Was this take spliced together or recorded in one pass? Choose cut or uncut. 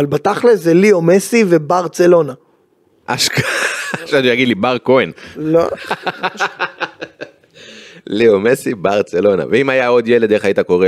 uncut